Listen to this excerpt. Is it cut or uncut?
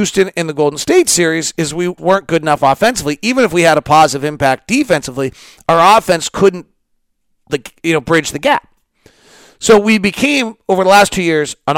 cut